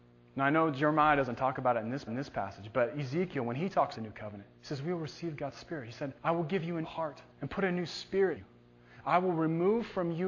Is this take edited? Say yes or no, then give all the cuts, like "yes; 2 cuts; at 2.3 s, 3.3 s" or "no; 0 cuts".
yes; 7 cuts; at 2.1 s, 3.9 s, 4.6 s, 6.2 s, 6.8 s, 7.3 s, 8.4 s